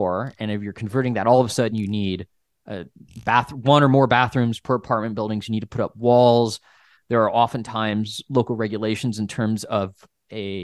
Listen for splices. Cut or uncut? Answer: uncut